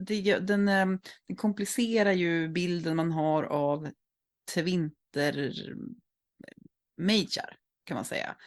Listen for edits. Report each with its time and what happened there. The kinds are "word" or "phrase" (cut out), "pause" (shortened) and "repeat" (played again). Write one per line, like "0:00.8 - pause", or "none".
none